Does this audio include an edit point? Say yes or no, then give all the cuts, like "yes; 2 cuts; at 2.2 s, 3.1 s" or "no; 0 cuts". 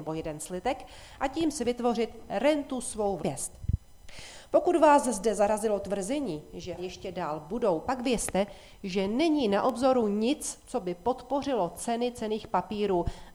yes; 2 cuts; at 3.2 s, 6.8 s